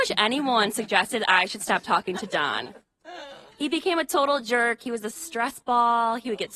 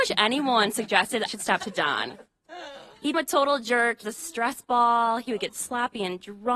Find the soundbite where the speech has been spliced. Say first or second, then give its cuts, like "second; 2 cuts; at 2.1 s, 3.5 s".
second; 4 cuts; at 1.3 s, 1.6 s, 3.1 s, 4.0 s